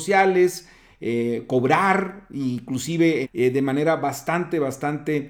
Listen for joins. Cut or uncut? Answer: cut